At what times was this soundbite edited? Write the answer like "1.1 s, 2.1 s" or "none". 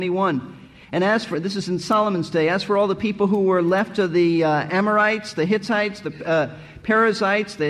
none

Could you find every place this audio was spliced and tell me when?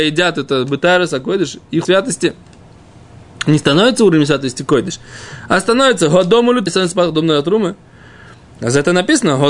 1.8 s, 6.7 s

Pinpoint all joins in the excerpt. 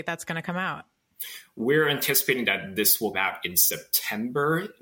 3.1 s

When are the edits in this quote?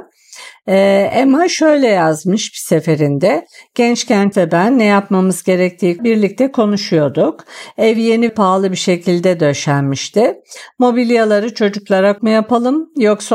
4.3 s, 6.0 s, 8.3 s, 12.2 s

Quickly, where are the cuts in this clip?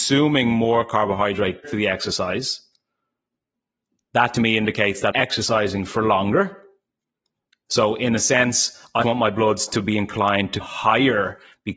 1.6 s, 5.1 s, 9.0 s, 10.6 s

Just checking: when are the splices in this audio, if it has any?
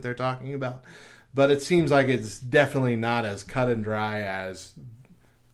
none

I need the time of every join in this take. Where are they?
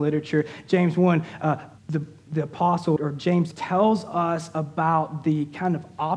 1.8 s, 3.0 s, 3.5 s

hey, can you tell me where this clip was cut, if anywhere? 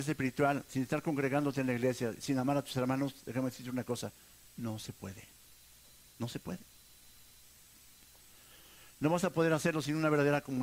none

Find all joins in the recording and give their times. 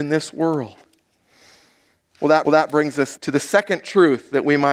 2.4 s, 3.2 s

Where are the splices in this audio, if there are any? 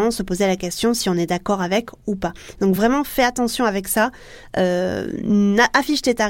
none

